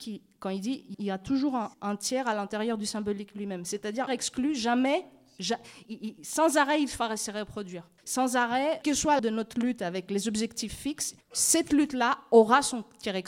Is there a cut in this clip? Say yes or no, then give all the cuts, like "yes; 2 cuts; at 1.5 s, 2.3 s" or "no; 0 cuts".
yes; 8 cuts; at 0.9 s, 1.7 s, 4.1 s, 5.9 s, 8.0 s, 8.8 s, 9.2 s, 11.2 s